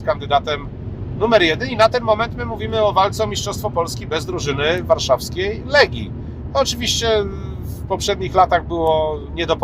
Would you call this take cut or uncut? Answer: uncut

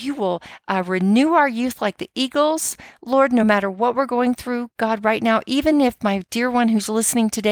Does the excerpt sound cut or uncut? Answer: uncut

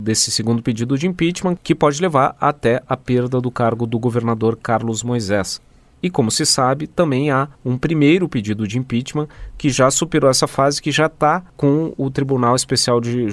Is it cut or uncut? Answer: cut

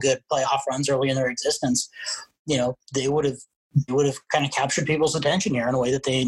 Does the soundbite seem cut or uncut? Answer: cut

